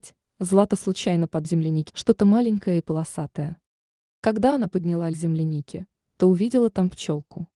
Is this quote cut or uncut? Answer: cut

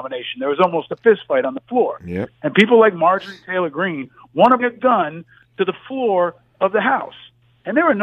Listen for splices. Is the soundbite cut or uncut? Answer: cut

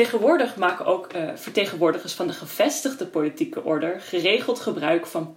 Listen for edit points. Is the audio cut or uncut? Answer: uncut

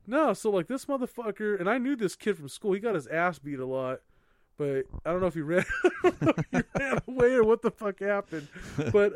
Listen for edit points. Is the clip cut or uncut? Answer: uncut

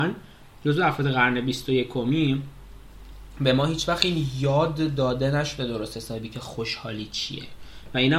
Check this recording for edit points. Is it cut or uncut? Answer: uncut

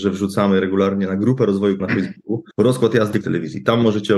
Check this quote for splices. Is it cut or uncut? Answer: cut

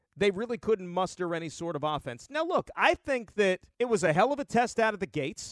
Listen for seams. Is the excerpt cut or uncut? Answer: cut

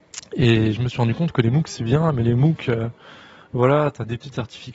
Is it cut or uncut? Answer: uncut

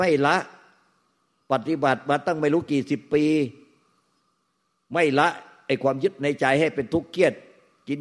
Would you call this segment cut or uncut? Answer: uncut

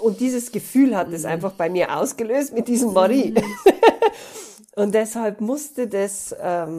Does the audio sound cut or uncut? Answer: uncut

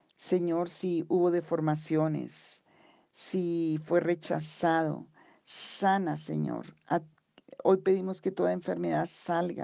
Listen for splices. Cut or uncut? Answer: uncut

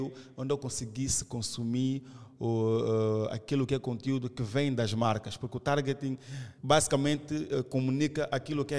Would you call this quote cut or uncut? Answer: cut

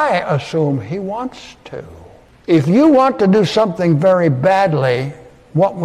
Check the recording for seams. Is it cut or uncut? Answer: uncut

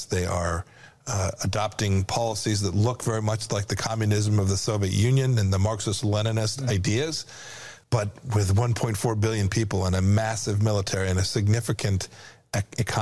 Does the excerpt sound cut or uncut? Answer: cut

